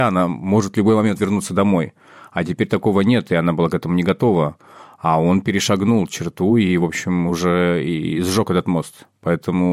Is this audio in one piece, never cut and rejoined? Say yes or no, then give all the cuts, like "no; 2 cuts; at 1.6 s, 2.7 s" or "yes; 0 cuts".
yes; 0 cuts